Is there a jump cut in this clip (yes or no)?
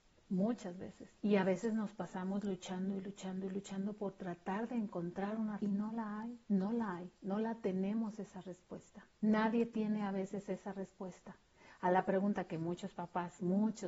yes